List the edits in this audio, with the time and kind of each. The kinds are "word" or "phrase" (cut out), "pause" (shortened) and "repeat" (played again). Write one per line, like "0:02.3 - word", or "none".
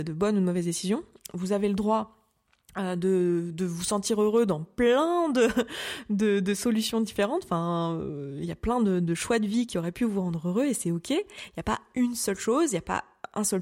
none